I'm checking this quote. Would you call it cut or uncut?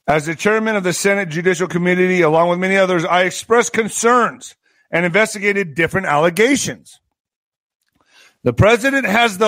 uncut